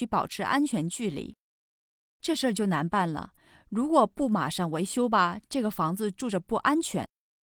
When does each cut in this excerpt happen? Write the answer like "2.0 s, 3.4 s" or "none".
none